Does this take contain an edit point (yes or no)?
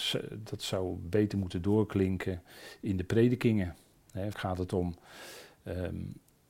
yes